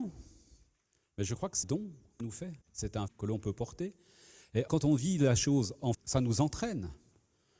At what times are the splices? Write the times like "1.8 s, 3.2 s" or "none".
1.6 s, 2.2 s, 2.6 s, 3.1 s, 4.7 s, 5.9 s